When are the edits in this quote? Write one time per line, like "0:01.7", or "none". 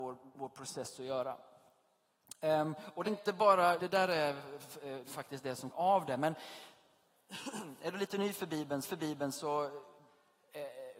0:03.0
0:03.8
0:05.7
0:08.8